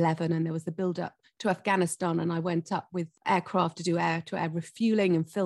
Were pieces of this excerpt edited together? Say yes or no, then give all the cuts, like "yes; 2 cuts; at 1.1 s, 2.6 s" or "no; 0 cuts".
no; 0 cuts